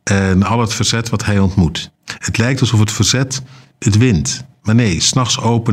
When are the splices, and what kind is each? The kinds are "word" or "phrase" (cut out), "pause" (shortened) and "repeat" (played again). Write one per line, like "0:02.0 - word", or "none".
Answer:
0:02.0 - pause